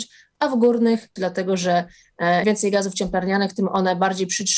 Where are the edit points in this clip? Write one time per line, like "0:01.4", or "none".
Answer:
0:01.2
0:02.4